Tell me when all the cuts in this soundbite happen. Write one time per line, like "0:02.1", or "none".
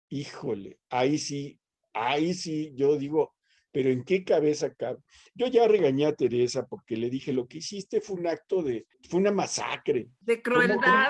0:08.9